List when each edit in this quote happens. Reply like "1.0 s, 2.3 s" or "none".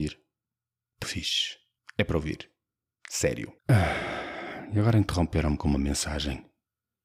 1.0 s, 1.8 s, 3.6 s

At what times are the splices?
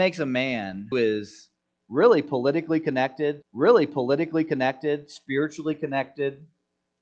0.9 s, 3.4 s

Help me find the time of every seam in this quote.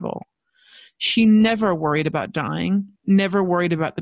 3.0 s

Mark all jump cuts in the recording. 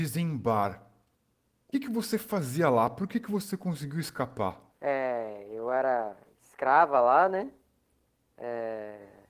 1.7 s, 4.7 s

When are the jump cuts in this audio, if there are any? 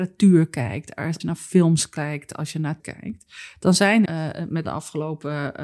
1.2 s, 2.8 s, 4.0 s, 4.6 s

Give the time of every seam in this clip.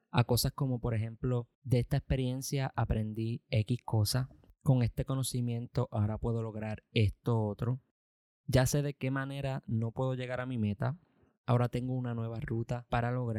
1.5 s

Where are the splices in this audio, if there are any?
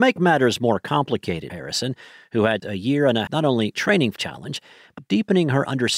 1.5 s, 2.6 s, 3.3 s, 3.7 s, 4.2 s, 5.0 s

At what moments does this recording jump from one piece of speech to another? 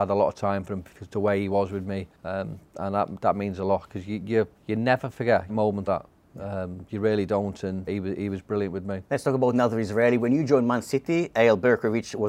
2.1 s, 4.5 s, 5.5 s, 5.9 s, 7.9 s, 9.0 s

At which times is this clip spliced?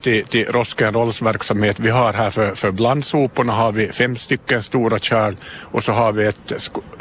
none

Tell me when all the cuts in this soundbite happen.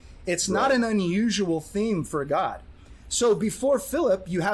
none

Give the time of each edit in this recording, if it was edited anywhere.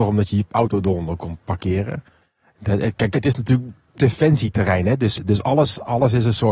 3.1 s

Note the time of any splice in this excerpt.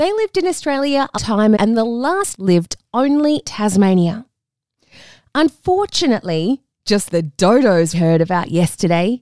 1.2 s, 1.6 s, 2.3 s, 3.5 s, 7.1 s, 7.9 s

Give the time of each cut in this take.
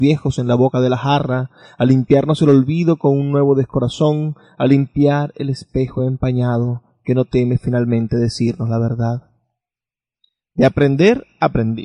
none

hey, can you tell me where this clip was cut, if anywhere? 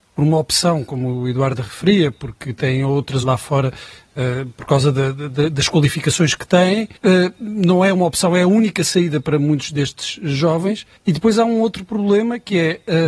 3.2 s, 7.0 s, 11.0 s

